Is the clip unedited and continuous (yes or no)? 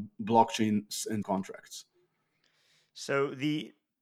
no